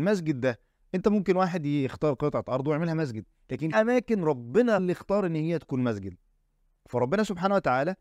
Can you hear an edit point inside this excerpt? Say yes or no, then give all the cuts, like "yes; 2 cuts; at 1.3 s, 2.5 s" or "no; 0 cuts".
yes; 2 cuts; at 3.7 s, 4.8 s